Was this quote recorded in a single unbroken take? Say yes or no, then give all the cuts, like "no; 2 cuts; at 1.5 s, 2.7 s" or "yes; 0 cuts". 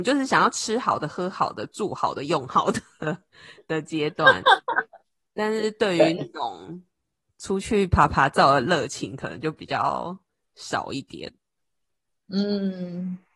yes; 0 cuts